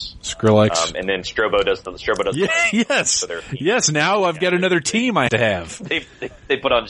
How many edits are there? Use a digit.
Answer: 1